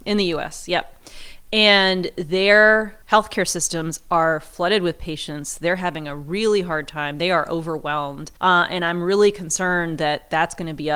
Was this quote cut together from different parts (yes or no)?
yes